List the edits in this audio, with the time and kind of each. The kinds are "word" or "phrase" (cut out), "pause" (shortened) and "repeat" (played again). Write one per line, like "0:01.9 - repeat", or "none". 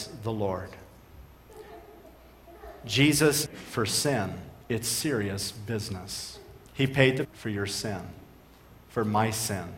0:03.5 - word
0:04.6 - pause
0:06.7 - pause
0:07.2 - word